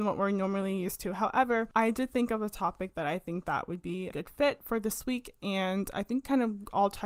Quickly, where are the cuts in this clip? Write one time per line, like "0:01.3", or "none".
0:04.1